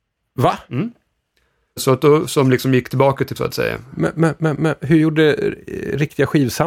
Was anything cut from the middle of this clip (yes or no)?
yes